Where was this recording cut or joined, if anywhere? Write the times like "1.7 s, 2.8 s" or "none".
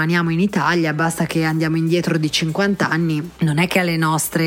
none